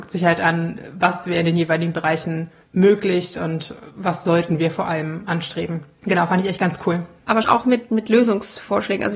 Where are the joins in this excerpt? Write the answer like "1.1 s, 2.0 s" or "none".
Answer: 7.4 s